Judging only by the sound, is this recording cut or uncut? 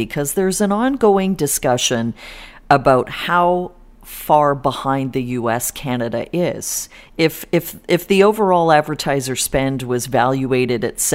cut